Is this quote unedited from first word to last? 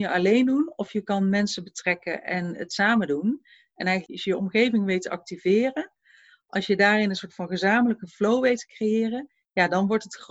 yes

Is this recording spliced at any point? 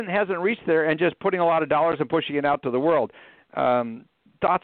no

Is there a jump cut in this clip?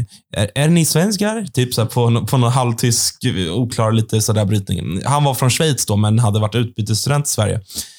no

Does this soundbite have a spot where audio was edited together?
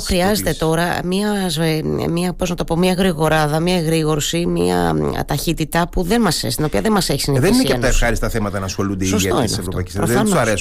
no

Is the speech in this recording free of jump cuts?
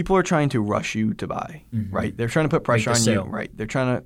yes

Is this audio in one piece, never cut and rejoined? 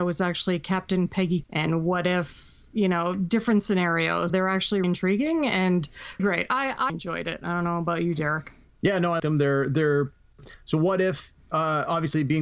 no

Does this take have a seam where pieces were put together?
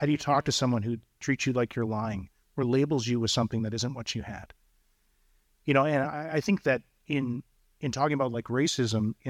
no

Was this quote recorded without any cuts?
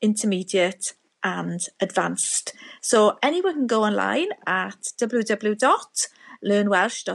yes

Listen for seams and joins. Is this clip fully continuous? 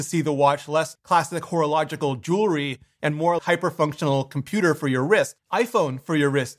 no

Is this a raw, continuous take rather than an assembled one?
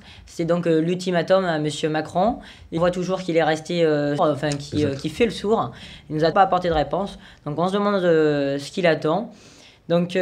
no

